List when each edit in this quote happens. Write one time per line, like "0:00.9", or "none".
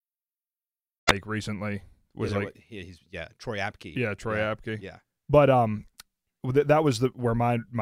none